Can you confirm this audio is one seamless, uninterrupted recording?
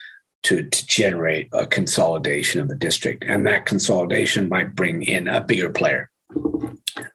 no; 1 cut; at 1.5 s

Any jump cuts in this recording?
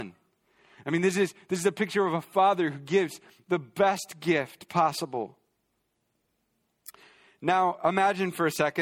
no; 0 cuts

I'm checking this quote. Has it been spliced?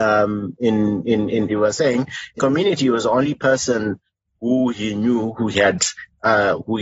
yes; 2 cuts; at 1.5 s, 2.4 s

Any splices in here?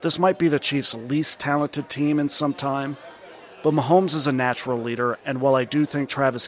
no; 0 cuts

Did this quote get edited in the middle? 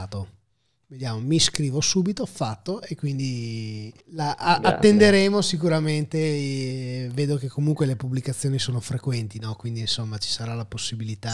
yes; 1 cut; at 4.0 s

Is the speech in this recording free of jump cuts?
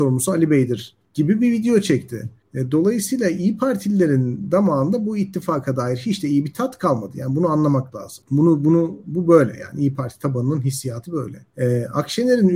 no; 2 cuts; at 1.0 s, 11.5 s

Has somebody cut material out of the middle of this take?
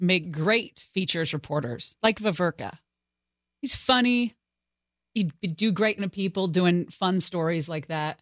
yes; 2 cuts; at 2.1 s, 6.0 s

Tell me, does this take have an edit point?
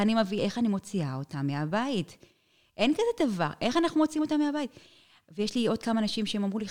no; 0 cuts

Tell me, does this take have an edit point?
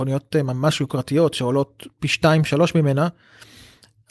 no; 0 cuts

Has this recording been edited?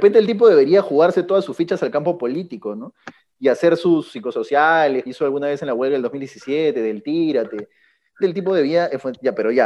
yes; 2 cuts; at 5.1 s, 8.2 s

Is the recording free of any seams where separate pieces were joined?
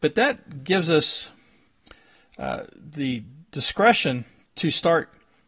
yes; 0 cuts

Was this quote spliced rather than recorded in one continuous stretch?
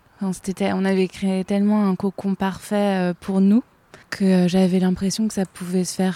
yes; 1 cut; at 4.0 s

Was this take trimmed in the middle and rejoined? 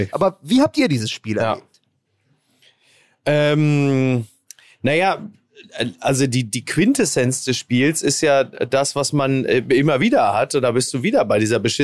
no; 0 cuts

